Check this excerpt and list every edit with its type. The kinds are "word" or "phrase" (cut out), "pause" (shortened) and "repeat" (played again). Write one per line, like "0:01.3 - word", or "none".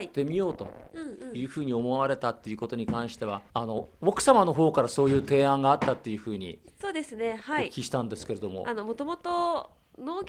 0:03.5 - pause